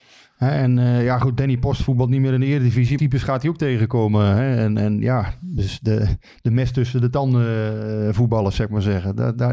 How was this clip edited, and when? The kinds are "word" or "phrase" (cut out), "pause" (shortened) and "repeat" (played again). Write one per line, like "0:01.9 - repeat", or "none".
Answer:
0:03.0 - phrase